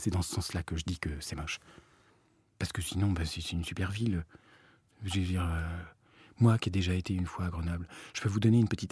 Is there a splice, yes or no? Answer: no